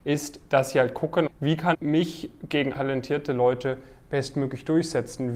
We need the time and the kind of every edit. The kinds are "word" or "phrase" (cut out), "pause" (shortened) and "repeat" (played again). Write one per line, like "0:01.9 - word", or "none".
0:01.3 - word
0:01.7 - word
0:02.7 - word